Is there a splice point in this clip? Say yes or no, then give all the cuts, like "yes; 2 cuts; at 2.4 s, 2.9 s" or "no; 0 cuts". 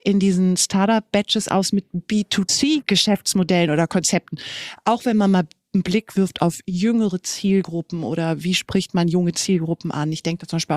no; 0 cuts